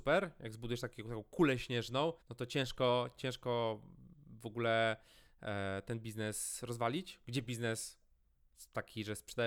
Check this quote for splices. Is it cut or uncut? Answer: cut